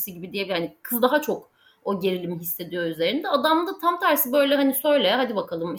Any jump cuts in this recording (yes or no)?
no